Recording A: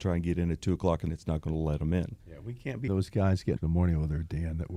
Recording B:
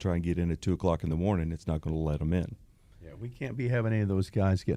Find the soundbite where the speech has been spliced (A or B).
A